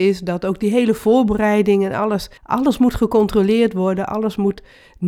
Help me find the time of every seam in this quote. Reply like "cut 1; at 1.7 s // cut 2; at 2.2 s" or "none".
cut 1; at 2.4 s